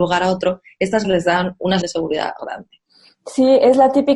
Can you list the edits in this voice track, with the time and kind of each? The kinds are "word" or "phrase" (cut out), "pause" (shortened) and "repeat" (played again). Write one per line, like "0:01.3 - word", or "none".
0:01.0 - word
0:01.8 - word
0:02.4 - word

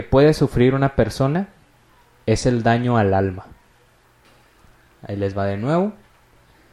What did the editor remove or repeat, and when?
none

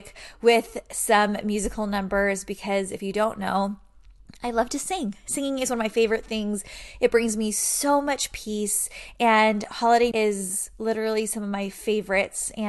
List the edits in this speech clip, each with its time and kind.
0:10.1 - word

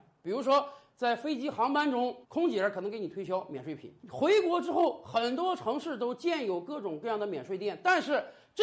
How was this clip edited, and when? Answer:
0:02.2 - pause

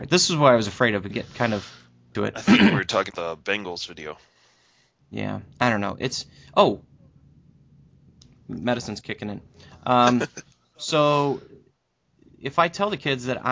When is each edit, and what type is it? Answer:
0:01.1 - word
0:02.1 - word
0:03.1 - word
0:05.5 - pause

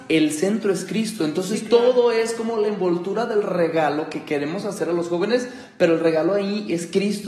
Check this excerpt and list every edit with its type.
none

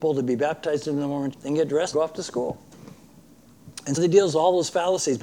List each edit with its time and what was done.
0:01.3 - word
0:01.9 - word
0:04.0 - word

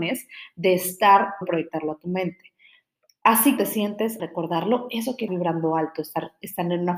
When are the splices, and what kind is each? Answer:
0:01.4 - phrase
0:03.6 - word
0:04.2 - word
0:05.3 - phrase

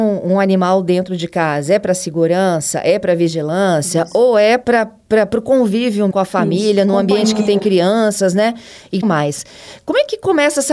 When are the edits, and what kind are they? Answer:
0:04.6 - word
0:06.1 - word
0:09.0 - word

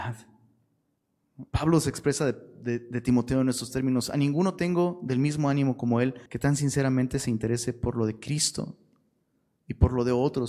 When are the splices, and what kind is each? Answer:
0:01.5 - pause
0:06.3 - pause

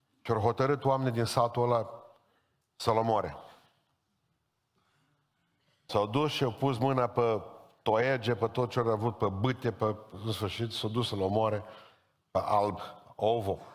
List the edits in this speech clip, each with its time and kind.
none

